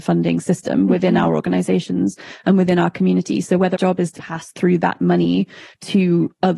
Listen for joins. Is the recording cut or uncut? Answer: cut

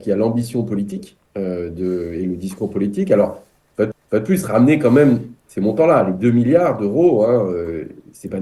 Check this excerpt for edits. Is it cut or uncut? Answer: cut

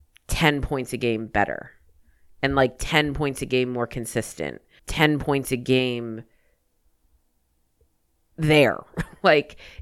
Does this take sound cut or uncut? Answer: cut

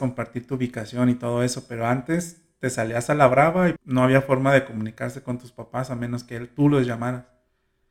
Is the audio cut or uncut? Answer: cut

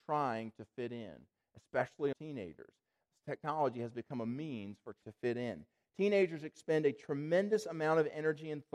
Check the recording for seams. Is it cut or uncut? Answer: cut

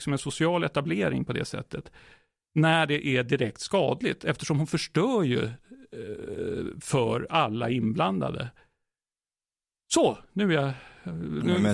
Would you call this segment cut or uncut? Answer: uncut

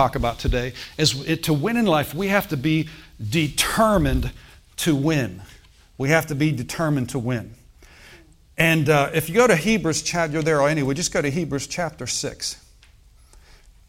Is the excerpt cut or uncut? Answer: uncut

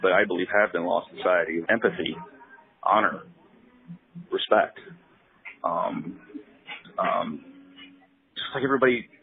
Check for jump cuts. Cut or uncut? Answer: cut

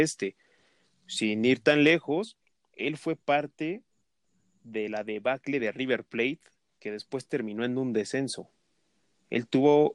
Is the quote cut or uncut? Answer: uncut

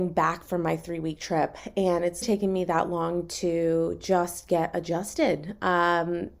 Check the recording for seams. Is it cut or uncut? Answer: cut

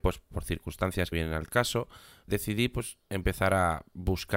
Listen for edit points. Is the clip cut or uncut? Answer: cut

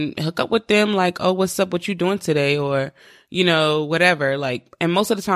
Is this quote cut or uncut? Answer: uncut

